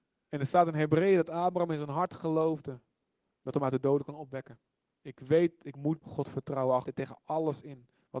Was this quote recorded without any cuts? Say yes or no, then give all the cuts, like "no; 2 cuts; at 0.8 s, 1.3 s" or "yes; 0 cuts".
no; 4 cuts; at 3.5 s, 4.9 s, 6.0 s, 6.8 s